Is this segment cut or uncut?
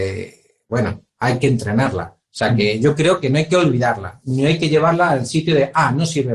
uncut